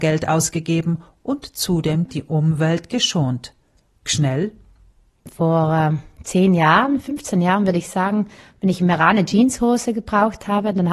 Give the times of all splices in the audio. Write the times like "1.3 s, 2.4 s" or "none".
none

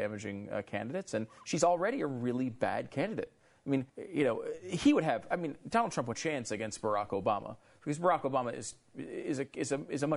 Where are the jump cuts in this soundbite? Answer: 3.9 s, 6.1 s

